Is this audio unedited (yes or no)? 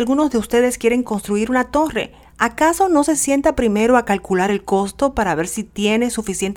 yes